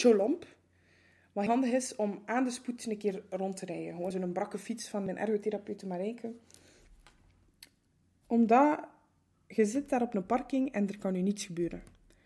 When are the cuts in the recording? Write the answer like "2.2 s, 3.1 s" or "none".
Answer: 1.5 s, 4.1 s, 5.1 s